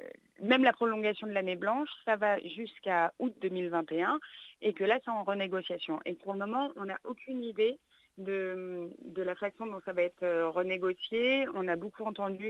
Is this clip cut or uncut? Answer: uncut